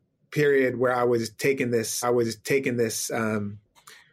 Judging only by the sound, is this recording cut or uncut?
cut